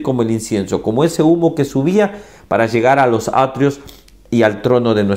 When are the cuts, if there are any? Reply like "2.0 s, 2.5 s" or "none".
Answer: none

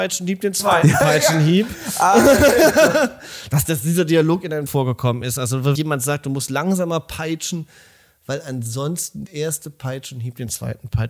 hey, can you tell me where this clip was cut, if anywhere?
3.6 s, 4.7 s, 5.7 s, 9.3 s

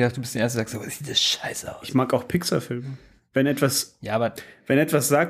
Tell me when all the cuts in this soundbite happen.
3.2 s

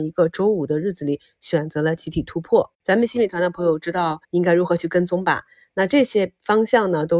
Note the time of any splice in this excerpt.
2.7 s, 4.2 s

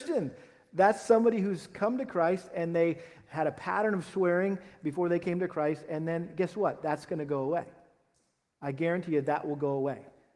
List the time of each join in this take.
none

